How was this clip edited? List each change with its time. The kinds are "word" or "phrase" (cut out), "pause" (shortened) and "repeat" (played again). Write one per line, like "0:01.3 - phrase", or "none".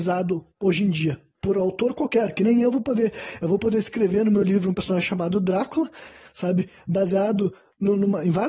none